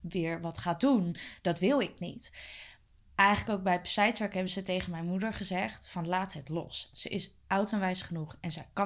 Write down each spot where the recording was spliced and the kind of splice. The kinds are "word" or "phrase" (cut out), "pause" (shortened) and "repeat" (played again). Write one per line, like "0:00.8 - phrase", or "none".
none